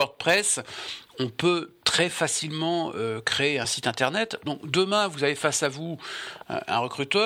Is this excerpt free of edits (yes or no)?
yes